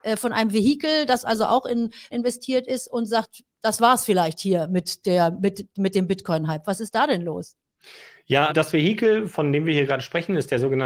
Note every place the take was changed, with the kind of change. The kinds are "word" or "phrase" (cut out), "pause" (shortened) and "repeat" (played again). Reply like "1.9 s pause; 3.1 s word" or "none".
2.1 s word; 8.5 s word